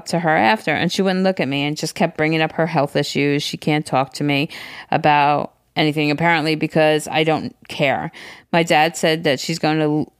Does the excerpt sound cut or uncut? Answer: uncut